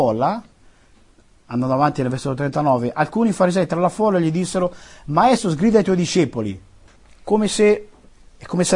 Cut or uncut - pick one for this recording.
uncut